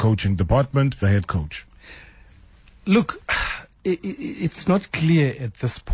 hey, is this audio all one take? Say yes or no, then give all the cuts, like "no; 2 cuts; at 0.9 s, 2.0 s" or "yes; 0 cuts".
no; 1 cut; at 1.0 s